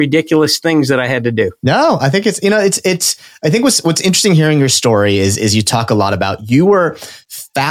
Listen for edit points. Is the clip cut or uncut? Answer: uncut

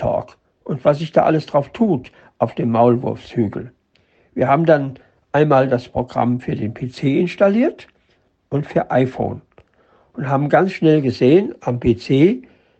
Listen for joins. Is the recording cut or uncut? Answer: uncut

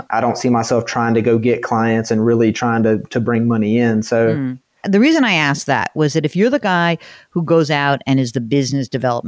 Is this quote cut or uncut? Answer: uncut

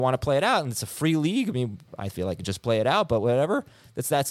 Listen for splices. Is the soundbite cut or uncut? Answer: uncut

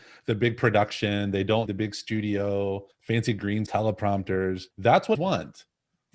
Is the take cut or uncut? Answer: cut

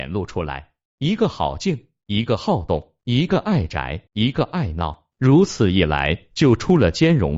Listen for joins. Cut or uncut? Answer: cut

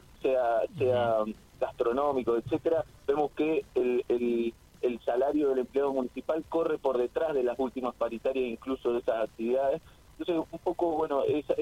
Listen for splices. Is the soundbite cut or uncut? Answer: uncut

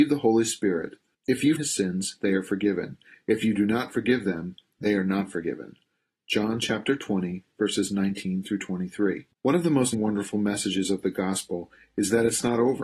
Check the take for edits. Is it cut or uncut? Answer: cut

